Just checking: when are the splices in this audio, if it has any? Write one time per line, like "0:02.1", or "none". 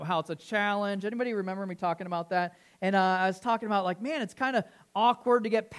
none